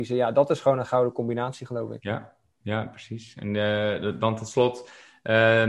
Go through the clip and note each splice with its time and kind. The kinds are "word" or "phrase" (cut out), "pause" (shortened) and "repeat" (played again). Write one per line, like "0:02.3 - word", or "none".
none